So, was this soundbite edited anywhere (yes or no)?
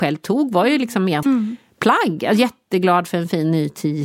yes